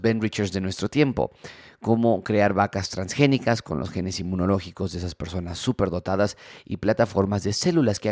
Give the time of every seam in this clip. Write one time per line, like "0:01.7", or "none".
none